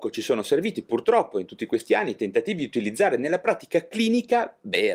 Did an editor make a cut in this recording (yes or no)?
no